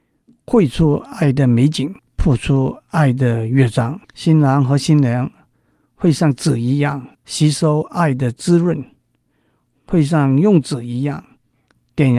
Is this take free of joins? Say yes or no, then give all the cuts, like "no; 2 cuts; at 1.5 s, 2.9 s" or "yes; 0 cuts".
no; 3 cuts; at 2.0 s, 4.0 s, 7.1 s